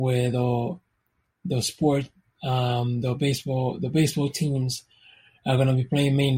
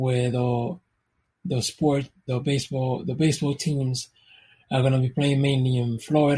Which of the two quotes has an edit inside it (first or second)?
second